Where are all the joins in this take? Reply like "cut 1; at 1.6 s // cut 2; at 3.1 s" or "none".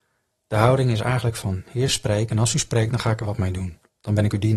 none